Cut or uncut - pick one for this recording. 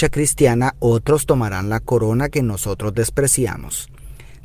uncut